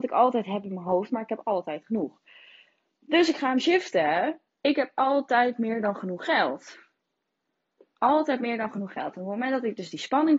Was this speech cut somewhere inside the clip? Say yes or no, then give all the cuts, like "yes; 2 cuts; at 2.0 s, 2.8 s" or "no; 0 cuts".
no; 0 cuts